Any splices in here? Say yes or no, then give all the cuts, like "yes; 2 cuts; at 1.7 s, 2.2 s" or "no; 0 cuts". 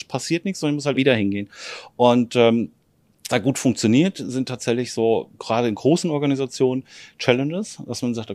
yes; 3 cuts; at 1.0 s, 3.3 s, 5.3 s